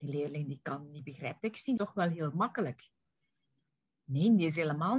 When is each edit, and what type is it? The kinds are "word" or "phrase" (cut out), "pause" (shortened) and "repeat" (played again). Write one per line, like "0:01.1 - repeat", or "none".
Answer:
0:01.4 - word
0:01.8 - word